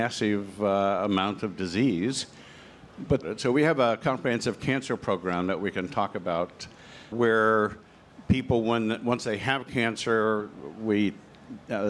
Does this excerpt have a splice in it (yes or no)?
yes